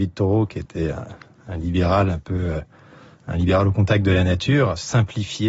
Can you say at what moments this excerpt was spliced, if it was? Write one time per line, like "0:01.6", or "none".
none

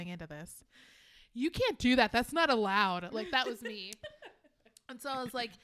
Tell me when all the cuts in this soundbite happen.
none

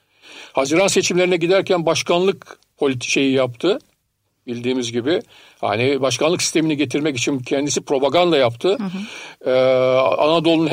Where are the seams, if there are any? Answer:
none

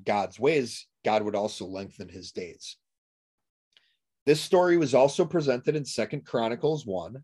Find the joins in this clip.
none

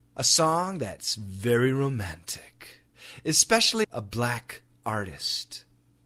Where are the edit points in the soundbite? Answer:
0:03.8

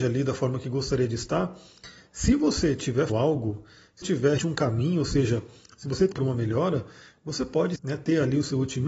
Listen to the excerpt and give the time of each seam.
0:03.1
0:04.0
0:04.4
0:06.1
0:07.8

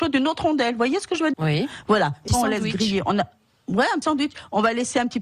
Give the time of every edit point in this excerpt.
0:01.3
0:02.3
0:04.0

